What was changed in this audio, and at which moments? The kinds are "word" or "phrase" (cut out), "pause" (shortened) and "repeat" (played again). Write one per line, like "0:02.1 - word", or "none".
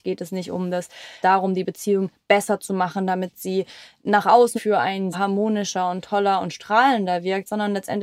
0:01.2 - word
0:04.6 - word
0:05.1 - word